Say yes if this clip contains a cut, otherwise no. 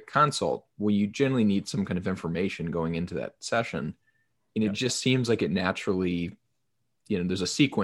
no